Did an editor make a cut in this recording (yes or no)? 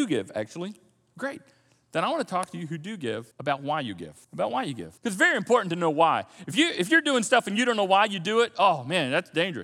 yes